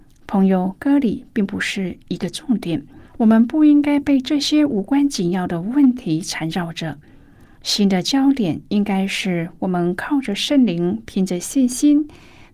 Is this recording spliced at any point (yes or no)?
yes